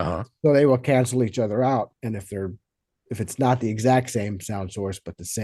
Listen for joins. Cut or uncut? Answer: uncut